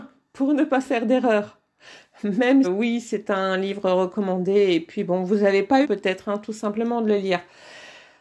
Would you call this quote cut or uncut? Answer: cut